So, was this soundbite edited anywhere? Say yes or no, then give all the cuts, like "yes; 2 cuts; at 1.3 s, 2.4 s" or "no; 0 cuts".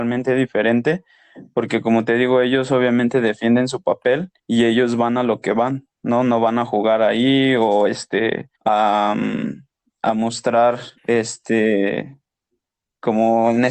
yes; 3 cuts; at 4.4 s, 8.5 s, 11.0 s